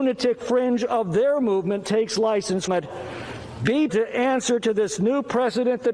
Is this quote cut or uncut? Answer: cut